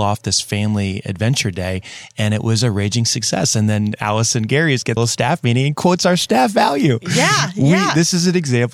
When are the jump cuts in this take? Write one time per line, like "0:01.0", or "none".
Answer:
0:05.0